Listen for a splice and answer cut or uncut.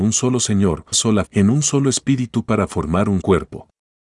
cut